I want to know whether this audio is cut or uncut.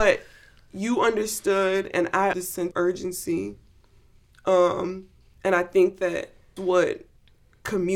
cut